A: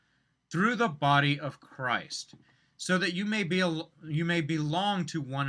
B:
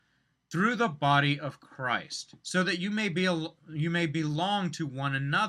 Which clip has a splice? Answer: B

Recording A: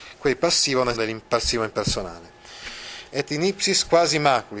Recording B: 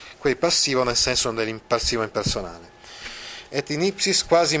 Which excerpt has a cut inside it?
A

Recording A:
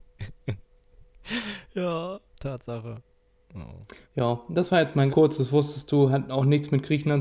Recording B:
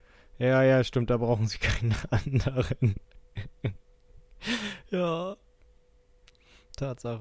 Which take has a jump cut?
A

